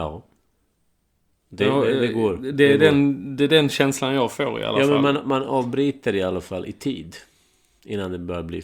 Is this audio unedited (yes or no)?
yes